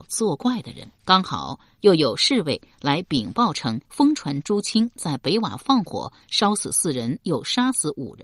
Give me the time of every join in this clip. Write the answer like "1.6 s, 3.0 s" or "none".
1.0 s, 3.8 s